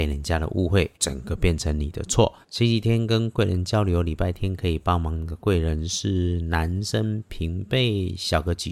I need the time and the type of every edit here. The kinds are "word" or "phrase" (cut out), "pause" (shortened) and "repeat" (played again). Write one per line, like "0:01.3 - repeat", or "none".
0:00.9 - pause
0:02.4 - pause